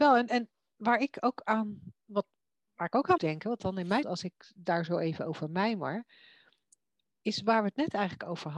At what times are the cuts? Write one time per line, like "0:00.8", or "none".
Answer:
0:03.2
0:04.0

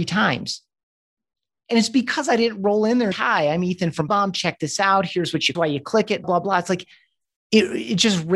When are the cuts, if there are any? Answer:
0:03.1
0:04.1
0:05.5
0:06.2

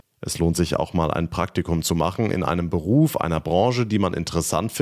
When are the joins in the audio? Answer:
none

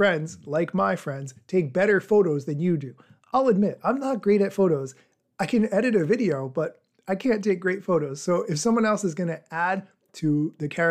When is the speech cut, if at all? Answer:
none

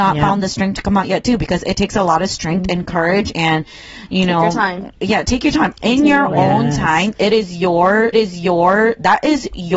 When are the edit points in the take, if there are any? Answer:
0:08.1

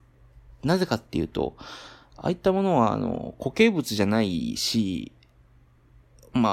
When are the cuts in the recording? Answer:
none

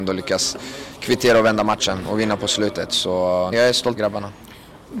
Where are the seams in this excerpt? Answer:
0:03.5
0:04.0

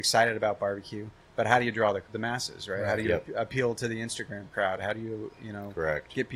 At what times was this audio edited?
0:02.1

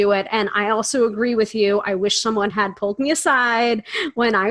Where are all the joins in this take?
none

